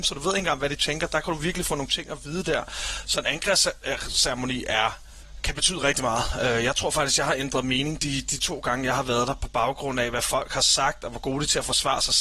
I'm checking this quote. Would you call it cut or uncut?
uncut